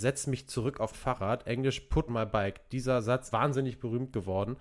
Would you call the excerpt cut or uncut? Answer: cut